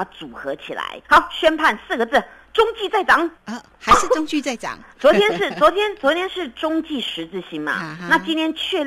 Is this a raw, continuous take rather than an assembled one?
no; 2 cuts; at 1.0 s, 3.4 s

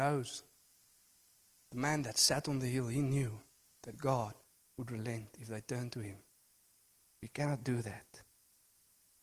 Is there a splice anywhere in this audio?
no; 0 cuts

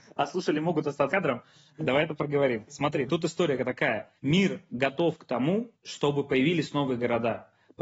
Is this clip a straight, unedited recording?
no; 3 cuts; at 1.1 s, 4.2 s, 5.7 s

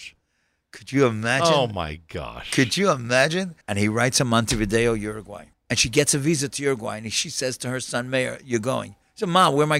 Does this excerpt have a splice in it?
yes; 2 cuts; at 3.6 s, 5.5 s

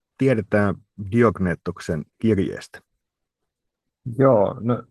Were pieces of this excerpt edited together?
yes; 1 cut; at 2.1 s

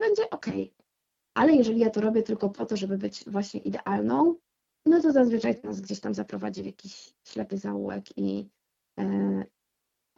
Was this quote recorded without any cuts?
yes; 0 cuts

